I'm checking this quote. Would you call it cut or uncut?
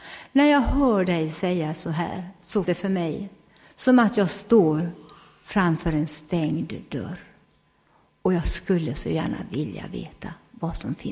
cut